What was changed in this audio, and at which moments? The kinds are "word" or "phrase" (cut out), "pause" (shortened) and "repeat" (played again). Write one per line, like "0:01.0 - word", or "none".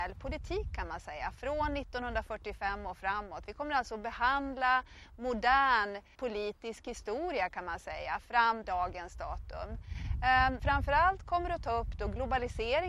0:06.1 - word
0:08.6 - word
0:10.6 - phrase